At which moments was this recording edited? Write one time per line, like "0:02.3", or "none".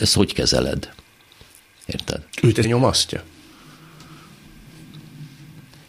0:02.6